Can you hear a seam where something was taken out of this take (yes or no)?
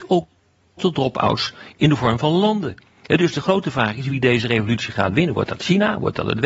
no